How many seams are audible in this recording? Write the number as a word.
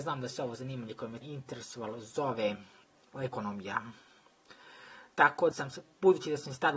three